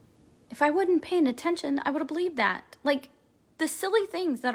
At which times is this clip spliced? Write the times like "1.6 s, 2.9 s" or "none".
none